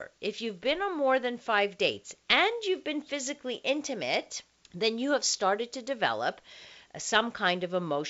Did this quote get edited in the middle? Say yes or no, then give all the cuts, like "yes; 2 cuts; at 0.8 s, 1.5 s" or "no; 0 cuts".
yes; 1 cut; at 4.6 s